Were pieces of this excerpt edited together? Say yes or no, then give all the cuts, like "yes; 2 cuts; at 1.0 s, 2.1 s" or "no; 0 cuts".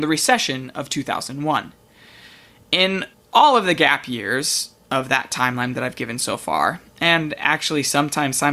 yes; 1 cut; at 3.1 s